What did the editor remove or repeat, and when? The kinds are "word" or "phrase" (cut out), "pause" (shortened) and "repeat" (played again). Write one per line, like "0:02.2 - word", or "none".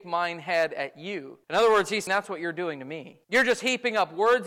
0:01.4 - pause
0:02.1 - word
0:03.2 - pause